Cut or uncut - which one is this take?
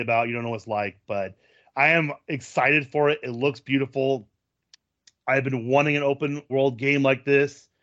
cut